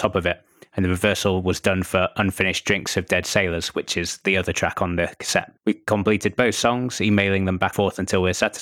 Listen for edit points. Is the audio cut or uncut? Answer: cut